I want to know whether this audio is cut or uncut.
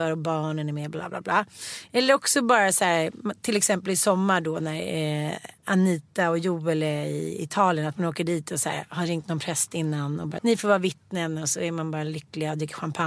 cut